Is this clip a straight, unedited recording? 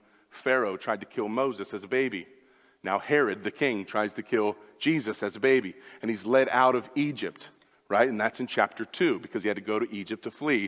yes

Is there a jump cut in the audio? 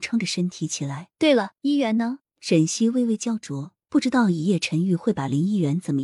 yes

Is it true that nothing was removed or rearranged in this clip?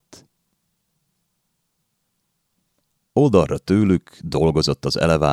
yes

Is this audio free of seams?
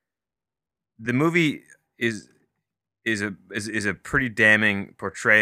yes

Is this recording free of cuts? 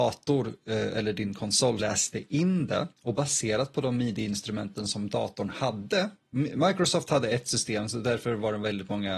no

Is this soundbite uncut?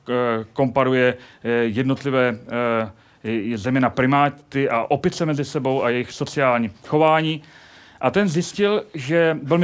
yes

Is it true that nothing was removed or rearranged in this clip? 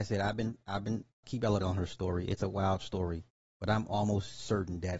no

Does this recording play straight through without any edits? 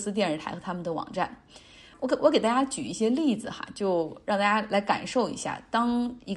yes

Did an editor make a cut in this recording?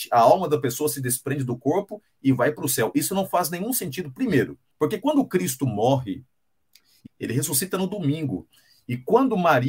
yes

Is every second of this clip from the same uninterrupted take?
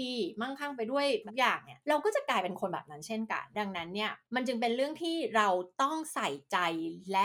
yes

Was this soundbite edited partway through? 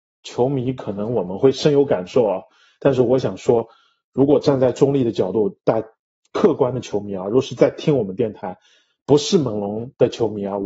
no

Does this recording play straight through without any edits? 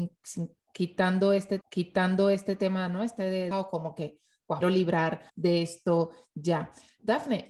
no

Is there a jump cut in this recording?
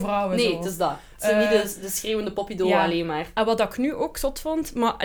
no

